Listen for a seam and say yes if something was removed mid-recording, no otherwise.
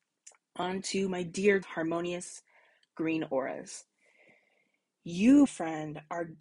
yes